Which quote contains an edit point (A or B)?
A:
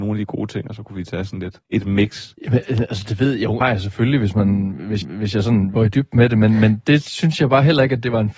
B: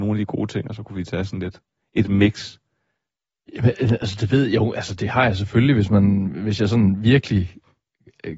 A